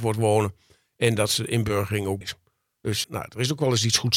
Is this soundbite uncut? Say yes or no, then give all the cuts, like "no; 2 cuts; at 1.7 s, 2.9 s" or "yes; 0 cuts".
no; 2 cuts; at 2.2 s, 3.0 s